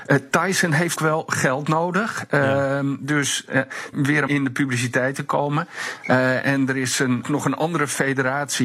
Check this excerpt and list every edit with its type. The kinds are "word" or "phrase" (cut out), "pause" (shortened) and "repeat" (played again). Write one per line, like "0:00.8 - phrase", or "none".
0:01.0 - word
0:03.9 - phrase
0:04.3 - phrase
0:07.2 - phrase